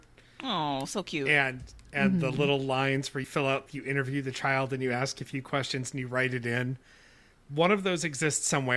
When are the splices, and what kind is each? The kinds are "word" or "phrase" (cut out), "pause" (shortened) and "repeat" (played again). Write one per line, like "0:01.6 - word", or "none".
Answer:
0:03.2 - word
0:03.7 - word